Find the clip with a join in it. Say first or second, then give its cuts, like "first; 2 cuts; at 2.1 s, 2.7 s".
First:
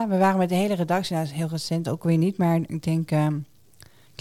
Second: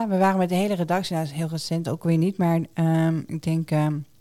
first; 1 cut; at 2.7 s